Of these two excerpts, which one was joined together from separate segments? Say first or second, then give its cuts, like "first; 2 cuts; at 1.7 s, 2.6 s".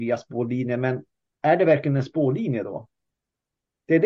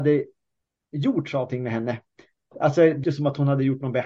second; 2 cuts; at 1.5 s, 3.0 s